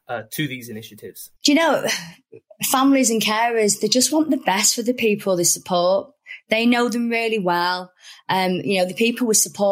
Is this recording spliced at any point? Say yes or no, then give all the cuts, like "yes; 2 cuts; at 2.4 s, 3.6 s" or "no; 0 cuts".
yes; 1 cut; at 1.4 s